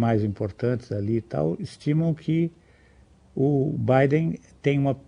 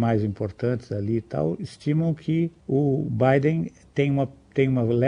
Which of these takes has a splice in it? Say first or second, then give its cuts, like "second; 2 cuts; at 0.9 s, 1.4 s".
second; 1 cut; at 2.6 s